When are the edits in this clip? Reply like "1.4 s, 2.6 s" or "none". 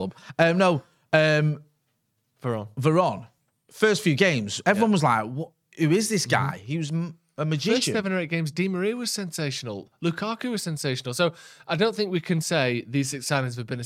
none